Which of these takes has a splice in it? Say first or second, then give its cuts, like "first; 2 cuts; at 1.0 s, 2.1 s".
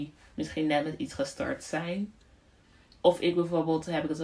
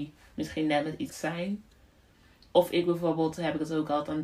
second; 1 cut; at 1.1 s